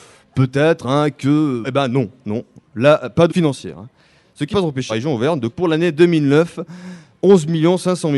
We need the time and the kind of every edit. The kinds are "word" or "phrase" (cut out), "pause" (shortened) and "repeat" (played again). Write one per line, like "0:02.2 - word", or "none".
0:01.6 - word
0:03.3 - word
0:04.5 - word
0:04.9 - word
0:05.5 - word